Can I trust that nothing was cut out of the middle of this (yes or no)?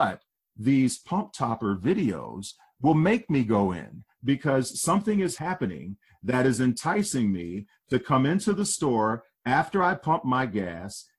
yes